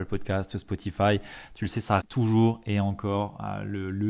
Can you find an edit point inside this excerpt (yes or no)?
yes